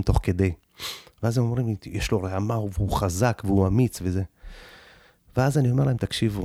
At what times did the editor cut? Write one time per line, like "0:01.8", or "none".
none